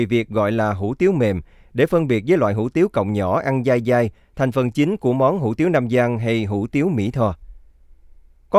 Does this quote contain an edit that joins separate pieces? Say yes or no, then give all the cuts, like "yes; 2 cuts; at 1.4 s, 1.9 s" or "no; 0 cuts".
no; 0 cuts